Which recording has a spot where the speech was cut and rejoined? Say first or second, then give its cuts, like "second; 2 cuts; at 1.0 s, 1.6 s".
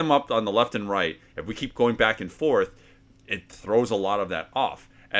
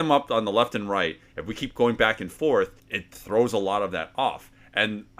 second; 1 cut; at 2.8 s